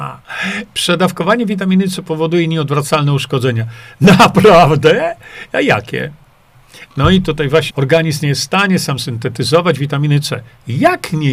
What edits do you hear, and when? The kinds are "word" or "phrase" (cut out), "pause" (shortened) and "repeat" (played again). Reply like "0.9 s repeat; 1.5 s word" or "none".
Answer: 7.7 s word